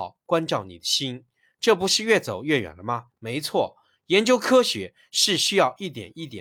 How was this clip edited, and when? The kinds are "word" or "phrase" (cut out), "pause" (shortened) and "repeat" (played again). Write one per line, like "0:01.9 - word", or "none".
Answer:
0:03.1 - pause

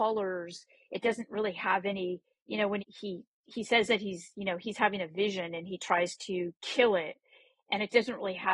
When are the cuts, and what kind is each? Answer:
0:02.8 - word
0:06.6 - pause

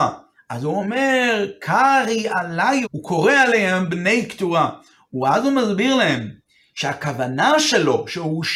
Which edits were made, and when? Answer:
0:02.8 - word

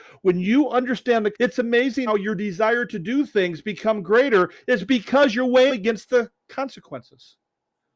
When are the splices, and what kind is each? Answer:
0:01.3 - word
0:02.1 - word
0:05.7 - word

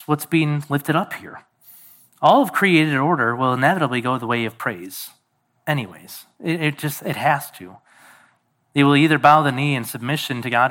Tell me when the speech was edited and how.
none

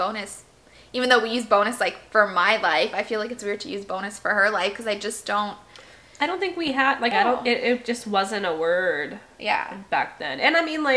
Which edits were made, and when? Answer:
0:07.1 - phrase

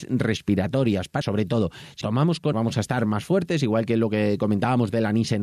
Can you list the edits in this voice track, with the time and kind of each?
0:01.2 - word
0:02.0 - word
0:02.5 - phrase

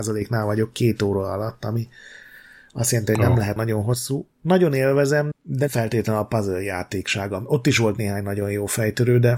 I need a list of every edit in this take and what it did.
0:03.6 - word
0:05.3 - word
0:05.7 - word

